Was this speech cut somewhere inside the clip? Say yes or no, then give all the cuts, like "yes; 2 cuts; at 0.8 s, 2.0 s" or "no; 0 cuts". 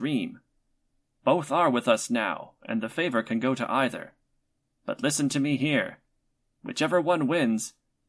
no; 0 cuts